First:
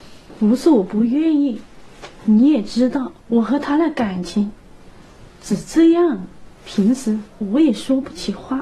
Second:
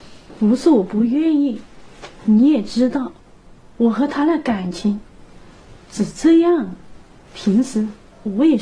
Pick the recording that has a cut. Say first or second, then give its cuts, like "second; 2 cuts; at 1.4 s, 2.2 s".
first; 3 cuts; at 3.2 s, 6.6 s, 7.3 s